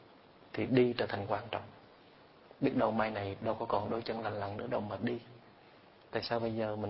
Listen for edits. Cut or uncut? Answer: uncut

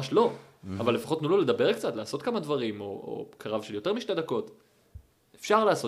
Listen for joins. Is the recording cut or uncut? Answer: uncut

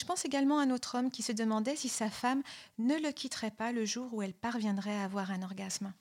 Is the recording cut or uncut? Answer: uncut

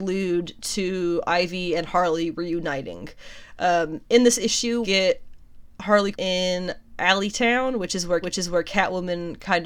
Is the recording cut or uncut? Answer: cut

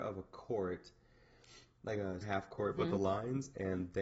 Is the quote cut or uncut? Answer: cut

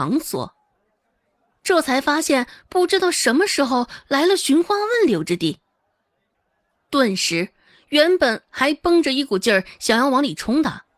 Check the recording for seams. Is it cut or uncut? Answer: uncut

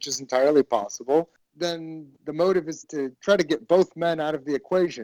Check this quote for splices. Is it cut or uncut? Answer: cut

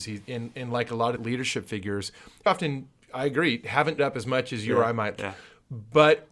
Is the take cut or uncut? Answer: cut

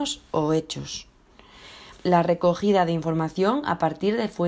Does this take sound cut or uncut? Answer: cut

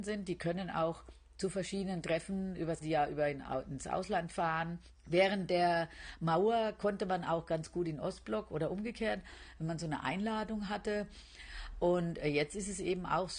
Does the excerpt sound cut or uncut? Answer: cut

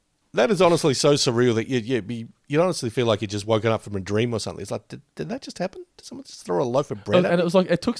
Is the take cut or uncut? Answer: uncut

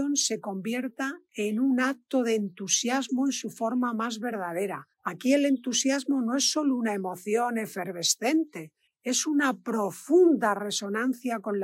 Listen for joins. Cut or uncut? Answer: cut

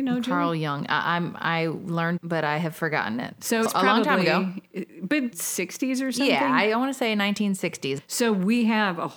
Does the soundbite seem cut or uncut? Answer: cut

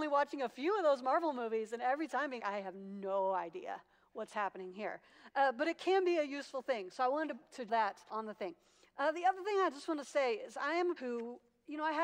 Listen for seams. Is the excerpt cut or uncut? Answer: cut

